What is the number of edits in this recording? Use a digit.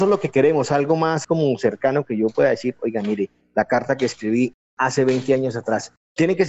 1